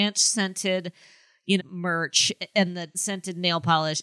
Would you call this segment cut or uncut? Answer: cut